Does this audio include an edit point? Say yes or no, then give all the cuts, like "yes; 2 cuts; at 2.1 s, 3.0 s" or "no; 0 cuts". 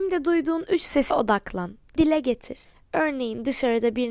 yes; 3 cuts; at 1.1 s, 2.0 s, 2.7 s